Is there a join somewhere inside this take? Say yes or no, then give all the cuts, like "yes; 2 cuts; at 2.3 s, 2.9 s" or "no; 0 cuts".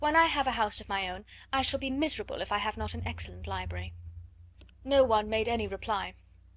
yes; 1 cut; at 4.7 s